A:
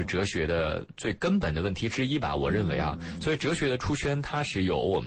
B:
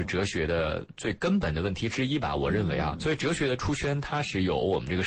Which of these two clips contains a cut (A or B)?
B